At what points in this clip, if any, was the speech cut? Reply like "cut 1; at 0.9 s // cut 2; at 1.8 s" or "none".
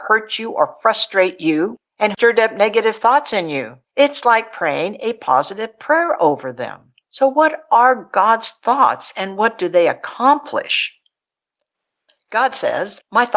cut 1; at 1.9 s // cut 2; at 3.8 s // cut 3; at 7.0 s